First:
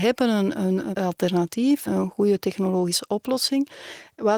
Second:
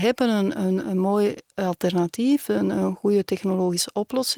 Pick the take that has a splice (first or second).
first